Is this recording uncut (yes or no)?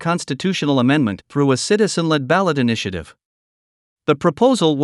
yes